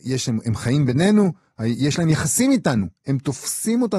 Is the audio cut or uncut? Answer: uncut